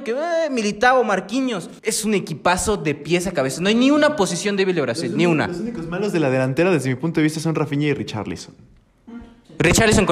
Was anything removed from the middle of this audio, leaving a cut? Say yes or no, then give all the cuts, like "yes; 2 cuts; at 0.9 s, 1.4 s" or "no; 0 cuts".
yes; 1 cut; at 1.8 s